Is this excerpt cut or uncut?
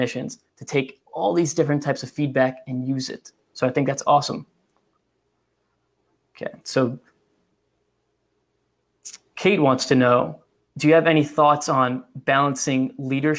cut